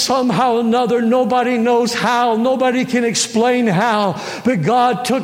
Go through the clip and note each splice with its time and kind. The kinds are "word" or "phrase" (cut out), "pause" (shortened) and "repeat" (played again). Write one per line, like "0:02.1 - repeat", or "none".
none